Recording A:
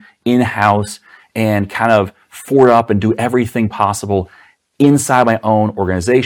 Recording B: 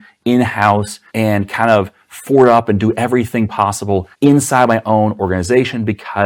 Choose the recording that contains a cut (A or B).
B